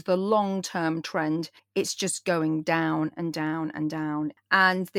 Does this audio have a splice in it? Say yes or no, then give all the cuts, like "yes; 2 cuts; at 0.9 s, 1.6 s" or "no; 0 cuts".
yes; 1 cut; at 1.6 s